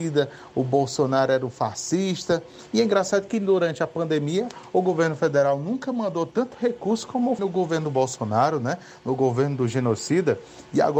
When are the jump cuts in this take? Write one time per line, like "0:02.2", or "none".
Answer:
0:07.4